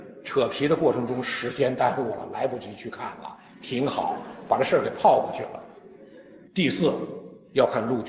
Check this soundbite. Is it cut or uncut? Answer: cut